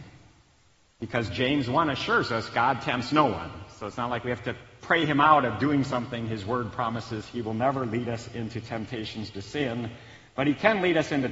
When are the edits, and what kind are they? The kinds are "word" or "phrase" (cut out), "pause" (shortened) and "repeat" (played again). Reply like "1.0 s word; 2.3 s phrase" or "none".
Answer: none